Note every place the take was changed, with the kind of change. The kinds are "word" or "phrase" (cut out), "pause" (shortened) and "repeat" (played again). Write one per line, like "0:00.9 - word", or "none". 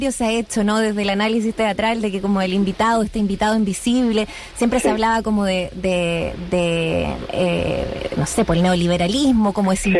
none